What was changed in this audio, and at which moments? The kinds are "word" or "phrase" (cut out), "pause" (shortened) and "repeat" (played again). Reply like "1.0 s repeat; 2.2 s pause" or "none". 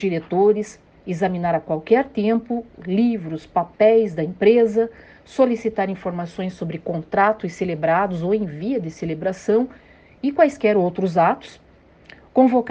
none